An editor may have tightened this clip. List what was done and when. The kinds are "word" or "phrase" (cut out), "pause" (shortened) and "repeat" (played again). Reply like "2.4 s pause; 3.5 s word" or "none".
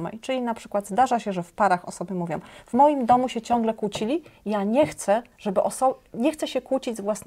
5.3 s pause